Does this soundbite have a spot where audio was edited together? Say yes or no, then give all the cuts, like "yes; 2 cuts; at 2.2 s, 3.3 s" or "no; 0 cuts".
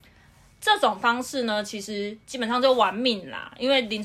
yes; 1 cut; at 2.2 s